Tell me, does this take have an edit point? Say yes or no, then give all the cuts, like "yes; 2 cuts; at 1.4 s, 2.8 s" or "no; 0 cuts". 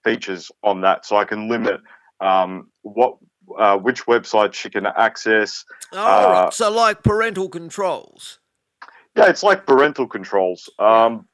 no; 0 cuts